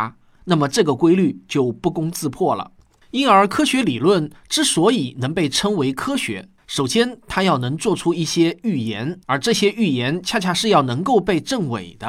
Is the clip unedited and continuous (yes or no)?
no